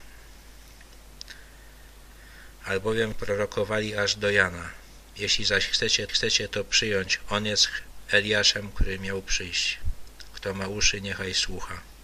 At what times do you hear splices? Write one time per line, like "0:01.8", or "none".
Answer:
0:03.1
0:06.1